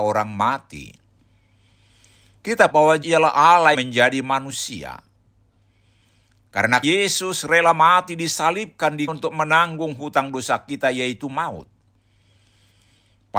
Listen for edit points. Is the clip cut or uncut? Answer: cut